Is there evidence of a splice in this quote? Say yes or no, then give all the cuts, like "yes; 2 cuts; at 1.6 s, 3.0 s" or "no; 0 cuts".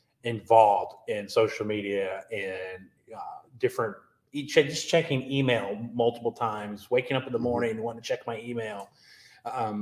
no; 0 cuts